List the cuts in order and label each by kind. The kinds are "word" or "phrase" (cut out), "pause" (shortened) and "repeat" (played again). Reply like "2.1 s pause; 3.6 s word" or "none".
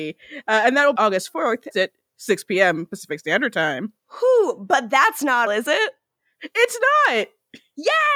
1.0 s phrase; 1.7 s phrase; 4.0 s pause; 5.5 s word